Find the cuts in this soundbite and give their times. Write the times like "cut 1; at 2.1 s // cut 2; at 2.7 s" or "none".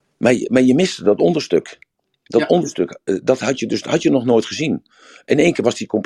none

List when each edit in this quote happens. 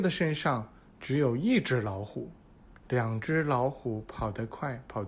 cut 1; at 2.6 s

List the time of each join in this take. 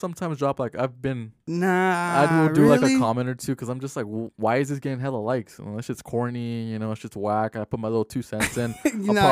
none

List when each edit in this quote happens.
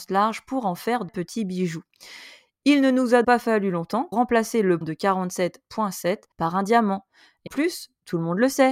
cut 1; at 1.1 s // cut 2; at 3.2 s // cut 3; at 4.1 s // cut 4; at 4.8 s // cut 5; at 6.3 s // cut 6; at 7.5 s

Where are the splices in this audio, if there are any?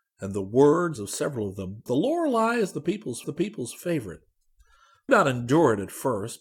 cut 1; at 1.0 s // cut 2; at 1.9 s // cut 3; at 3.2 s // cut 4; at 5.1 s

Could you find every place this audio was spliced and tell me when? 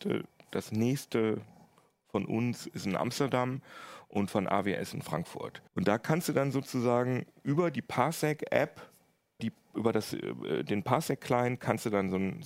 cut 1; at 5.7 s // cut 2; at 9.4 s

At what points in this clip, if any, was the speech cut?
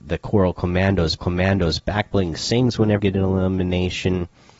cut 1; at 1.2 s // cut 2; at 3.0 s

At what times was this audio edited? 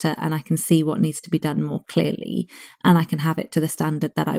none

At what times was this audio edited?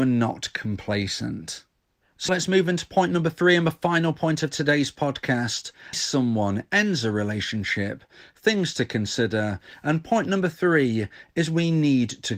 cut 1; at 2.3 s // cut 2; at 5.9 s

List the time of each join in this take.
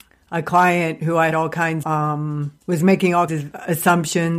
cut 1; at 1.3 s // cut 2; at 1.8 s // cut 3; at 2.6 s // cut 4; at 3.3 s

